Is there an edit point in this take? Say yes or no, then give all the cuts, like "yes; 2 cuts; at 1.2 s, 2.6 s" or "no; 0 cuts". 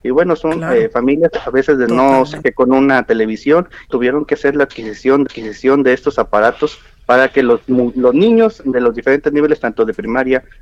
yes; 4 cuts; at 1.9 s, 2.4 s, 3.9 s, 5.3 s